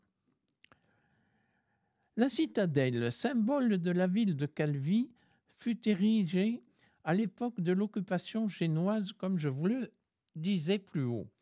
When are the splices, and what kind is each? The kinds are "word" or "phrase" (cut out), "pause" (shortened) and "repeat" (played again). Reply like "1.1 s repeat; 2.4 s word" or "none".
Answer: none